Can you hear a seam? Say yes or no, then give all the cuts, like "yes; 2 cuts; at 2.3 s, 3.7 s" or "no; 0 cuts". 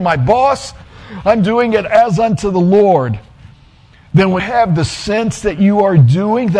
yes; 1 cut; at 4.4 s